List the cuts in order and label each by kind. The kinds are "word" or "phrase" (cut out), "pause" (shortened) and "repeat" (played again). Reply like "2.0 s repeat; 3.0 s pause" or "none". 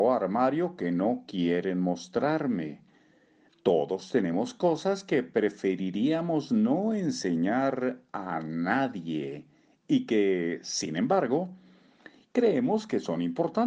none